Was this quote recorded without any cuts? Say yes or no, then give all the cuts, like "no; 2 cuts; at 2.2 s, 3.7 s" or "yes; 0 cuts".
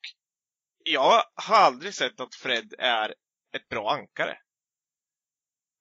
yes; 0 cuts